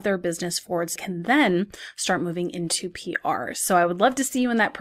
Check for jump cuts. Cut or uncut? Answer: cut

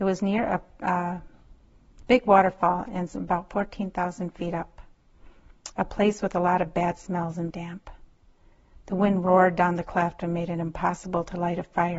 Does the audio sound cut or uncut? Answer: cut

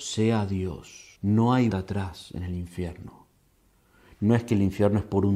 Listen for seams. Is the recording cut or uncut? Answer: cut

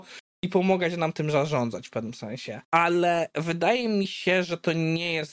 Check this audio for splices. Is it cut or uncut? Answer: cut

